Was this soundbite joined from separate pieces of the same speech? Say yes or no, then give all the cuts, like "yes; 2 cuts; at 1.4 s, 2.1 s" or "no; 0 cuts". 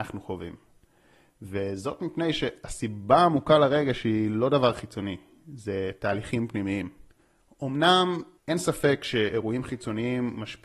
no; 0 cuts